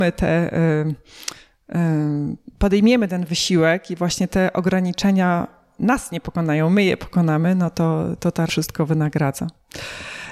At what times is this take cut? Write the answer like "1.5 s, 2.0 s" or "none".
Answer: 8.5 s

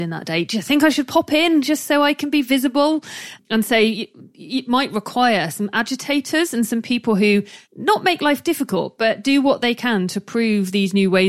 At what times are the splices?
7.6 s

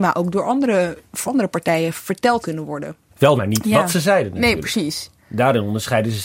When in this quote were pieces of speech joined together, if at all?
1.3 s, 2.4 s, 3.4 s, 5.2 s

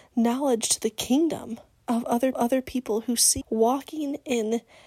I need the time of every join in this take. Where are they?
2.3 s, 3.4 s

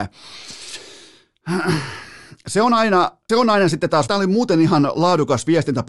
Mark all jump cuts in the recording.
3.3 s, 4.1 s

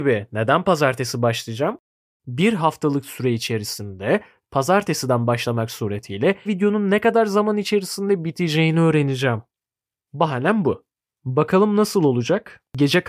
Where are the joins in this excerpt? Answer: 6.5 s

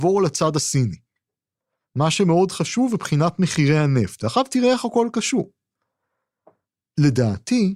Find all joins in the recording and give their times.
none

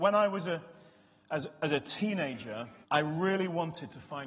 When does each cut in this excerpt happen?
2.8 s

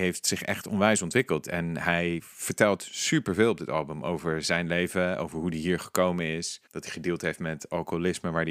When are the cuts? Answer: 6.7 s

